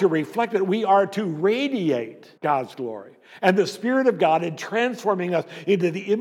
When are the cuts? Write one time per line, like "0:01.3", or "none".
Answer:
0:02.4